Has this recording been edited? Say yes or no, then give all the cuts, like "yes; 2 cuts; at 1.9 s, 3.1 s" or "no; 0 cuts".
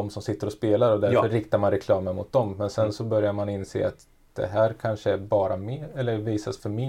no; 0 cuts